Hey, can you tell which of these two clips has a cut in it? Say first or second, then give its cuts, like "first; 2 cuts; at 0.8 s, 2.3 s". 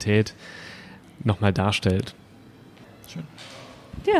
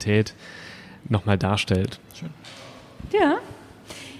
second; 2 cuts; at 1.0 s, 2.0 s